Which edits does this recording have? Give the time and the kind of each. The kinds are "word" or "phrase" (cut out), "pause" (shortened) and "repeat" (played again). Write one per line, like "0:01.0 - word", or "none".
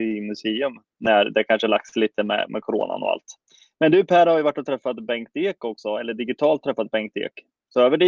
none